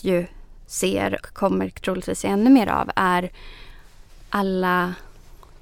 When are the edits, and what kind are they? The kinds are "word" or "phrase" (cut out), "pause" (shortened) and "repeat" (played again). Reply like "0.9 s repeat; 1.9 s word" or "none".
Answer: 1.2 s word